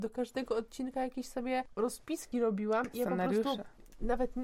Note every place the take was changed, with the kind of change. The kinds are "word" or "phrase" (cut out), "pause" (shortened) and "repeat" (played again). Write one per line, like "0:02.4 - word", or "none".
none